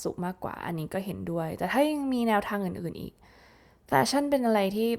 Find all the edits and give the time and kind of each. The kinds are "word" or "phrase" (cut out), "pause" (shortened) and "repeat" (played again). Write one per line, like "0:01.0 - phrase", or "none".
none